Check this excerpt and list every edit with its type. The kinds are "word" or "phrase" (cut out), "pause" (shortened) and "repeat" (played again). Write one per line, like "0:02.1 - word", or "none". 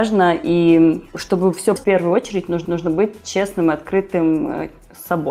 0:01.8 - word
0:02.6 - repeat